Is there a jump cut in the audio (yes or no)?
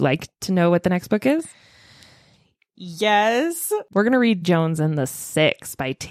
yes